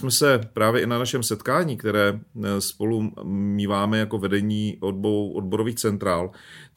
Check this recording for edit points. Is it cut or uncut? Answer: uncut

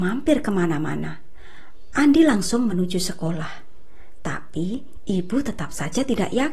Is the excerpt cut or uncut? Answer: uncut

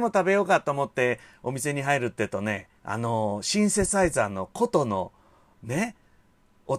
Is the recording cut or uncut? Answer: cut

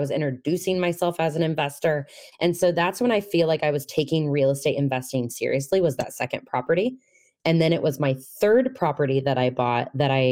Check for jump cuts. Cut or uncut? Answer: uncut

